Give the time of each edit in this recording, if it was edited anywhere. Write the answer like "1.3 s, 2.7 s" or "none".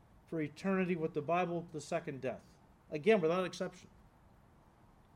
1.7 s, 2.7 s